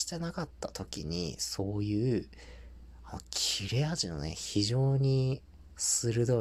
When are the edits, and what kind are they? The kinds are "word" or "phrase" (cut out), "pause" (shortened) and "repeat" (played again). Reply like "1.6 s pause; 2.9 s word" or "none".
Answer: none

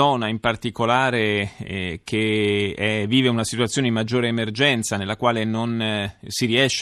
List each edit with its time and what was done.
none

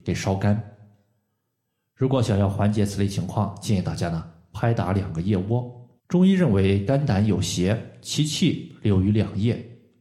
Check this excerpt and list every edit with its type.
6.0 s pause

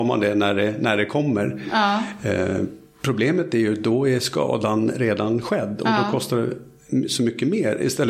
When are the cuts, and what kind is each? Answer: none

